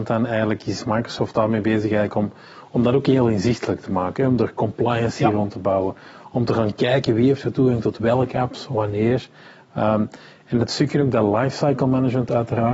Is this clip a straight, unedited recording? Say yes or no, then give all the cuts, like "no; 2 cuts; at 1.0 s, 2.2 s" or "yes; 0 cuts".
yes; 0 cuts